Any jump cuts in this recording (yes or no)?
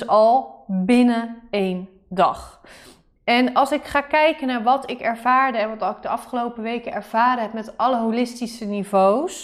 no